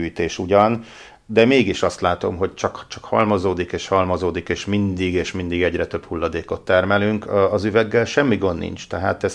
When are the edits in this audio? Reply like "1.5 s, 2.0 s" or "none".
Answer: none